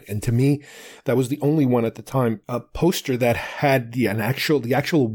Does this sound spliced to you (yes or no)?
yes